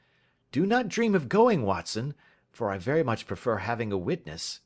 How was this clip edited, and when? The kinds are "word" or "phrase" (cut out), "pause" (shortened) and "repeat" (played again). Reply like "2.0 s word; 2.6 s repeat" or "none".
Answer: none